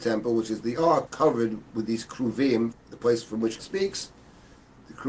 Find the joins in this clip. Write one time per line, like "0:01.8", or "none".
0:01.1
0:02.7
0:03.6